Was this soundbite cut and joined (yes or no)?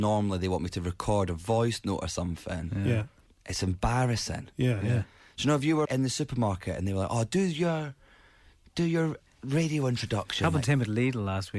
yes